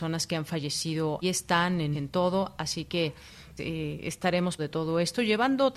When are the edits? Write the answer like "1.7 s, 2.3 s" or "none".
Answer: 1.2 s, 1.9 s, 3.6 s, 4.6 s